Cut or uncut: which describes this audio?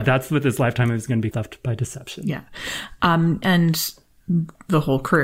cut